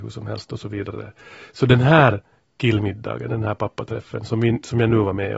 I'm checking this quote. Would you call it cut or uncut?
uncut